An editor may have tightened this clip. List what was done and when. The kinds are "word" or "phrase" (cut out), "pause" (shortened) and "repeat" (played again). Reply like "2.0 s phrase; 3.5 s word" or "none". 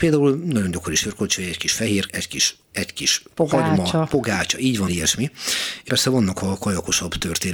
2.1 s word; 2.7 s word; 4.9 s word; 5.9 s word